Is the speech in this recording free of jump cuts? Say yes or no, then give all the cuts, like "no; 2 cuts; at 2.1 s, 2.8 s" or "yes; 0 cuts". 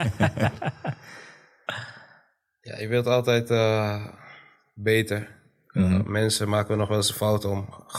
yes; 0 cuts